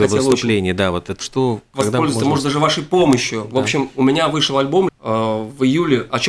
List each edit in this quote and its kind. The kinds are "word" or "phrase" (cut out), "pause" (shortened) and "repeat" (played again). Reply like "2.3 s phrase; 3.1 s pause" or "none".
1.2 s word; 4.9 s word